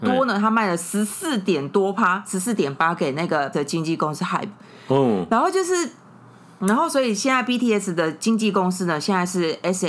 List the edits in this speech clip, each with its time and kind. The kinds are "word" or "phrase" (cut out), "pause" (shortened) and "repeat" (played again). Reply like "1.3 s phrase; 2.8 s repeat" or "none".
3.5 s word

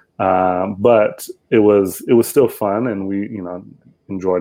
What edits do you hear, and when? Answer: none

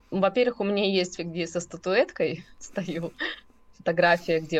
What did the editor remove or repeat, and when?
1.2 s word

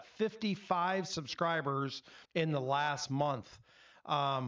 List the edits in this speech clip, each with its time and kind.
2.2 s pause

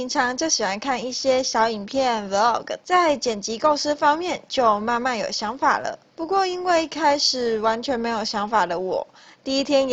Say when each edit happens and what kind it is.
2.8 s phrase; 6.1 s pause

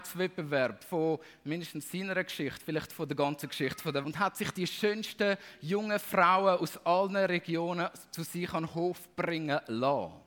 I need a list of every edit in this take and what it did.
4.0 s phrase

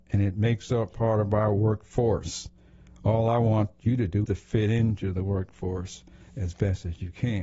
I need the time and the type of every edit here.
4.2 s word

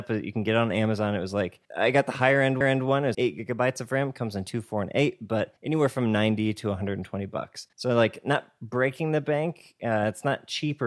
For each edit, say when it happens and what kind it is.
1.6 s pause; 2.6 s repeat; 3.1 s word; 5.6 s pause; 7.7 s pause

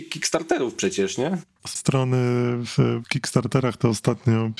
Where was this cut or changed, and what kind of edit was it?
1.8 s word; 3.0 s word

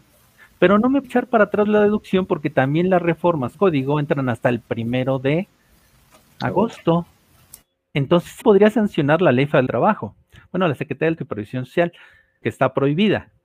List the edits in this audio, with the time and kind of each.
1.0 s word; 3.5 s word; 8.4 s word; 9.7 s word; 11.2 s word; 12.4 s word

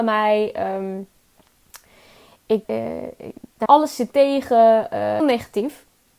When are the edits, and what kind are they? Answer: 2.7 s word; 3.7 s word; 4.1 s word; 5.2 s word

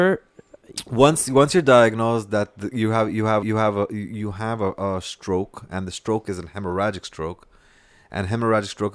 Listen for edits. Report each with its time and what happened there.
3.4 s repeat

